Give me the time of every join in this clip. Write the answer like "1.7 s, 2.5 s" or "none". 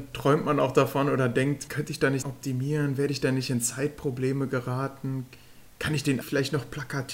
1.7 s, 2.2 s, 6.2 s